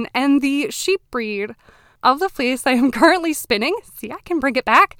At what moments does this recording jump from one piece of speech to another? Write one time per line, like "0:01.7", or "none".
none